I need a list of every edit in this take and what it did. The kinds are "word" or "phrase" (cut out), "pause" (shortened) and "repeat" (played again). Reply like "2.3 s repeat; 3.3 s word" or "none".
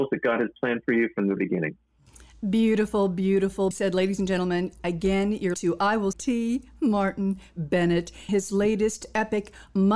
1.4 s word; 3.7 s word; 5.5 s word; 6.1 s word; 8.3 s word